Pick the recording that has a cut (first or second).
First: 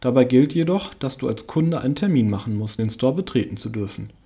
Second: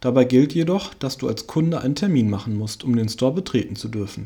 first